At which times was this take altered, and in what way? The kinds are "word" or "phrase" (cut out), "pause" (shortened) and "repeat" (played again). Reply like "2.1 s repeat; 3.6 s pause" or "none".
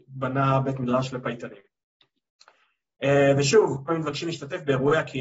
3.9 s word